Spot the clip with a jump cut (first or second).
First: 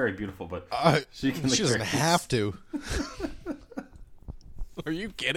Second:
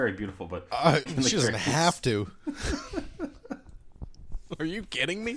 second